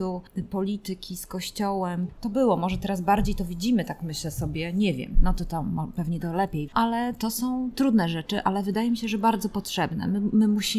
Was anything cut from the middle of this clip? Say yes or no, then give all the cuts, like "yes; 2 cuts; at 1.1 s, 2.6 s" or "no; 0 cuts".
yes; 1 cut; at 6.7 s